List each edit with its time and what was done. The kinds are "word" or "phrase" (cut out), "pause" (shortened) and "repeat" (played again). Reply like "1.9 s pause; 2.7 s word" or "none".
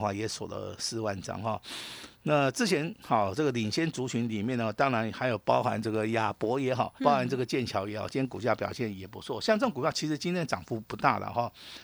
7.0 s word

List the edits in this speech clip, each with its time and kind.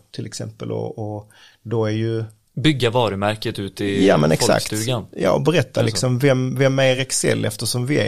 none

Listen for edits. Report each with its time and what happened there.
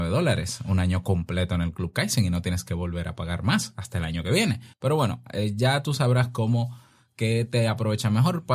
4.7 s pause

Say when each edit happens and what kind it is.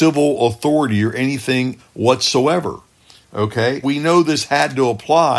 1.8 s word; 3.8 s word

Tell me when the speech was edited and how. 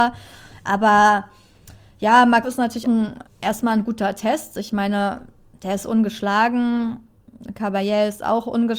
2.4 s word; 2.8 s word; 3.2 s word

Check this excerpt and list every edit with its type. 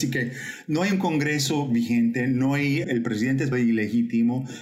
2.8 s word; 3.5 s word

